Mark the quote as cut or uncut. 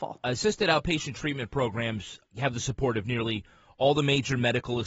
uncut